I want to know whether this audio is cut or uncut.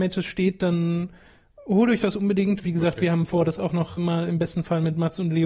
cut